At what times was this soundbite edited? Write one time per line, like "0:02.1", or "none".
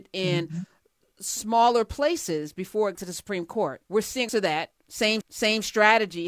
0:02.9
0:03.8
0:04.3
0:05.2